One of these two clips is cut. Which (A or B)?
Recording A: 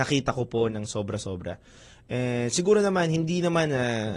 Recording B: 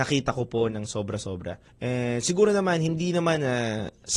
B